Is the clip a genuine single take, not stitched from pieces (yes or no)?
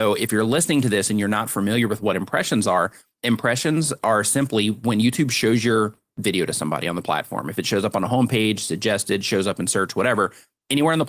yes